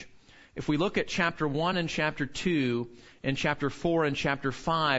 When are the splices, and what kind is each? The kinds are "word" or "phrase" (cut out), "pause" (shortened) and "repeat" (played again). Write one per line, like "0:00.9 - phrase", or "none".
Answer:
none